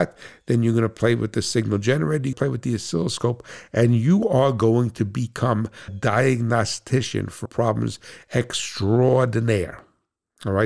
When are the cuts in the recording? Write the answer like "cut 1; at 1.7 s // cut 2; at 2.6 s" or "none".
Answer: cut 1; at 2.3 s // cut 2; at 5.9 s // cut 3; at 7.4 s